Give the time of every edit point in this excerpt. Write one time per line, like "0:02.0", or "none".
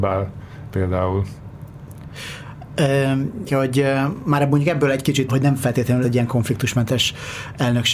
0:03.5
0:05.3
0:06.0